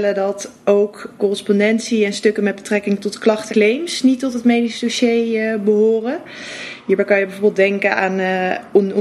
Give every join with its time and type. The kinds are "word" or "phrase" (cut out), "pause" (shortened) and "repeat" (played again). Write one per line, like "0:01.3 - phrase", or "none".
0:01.2 - word
0:03.5 - word